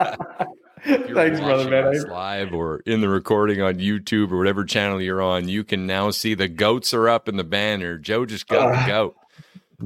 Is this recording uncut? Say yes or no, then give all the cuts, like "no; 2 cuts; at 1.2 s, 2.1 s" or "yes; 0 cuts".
yes; 0 cuts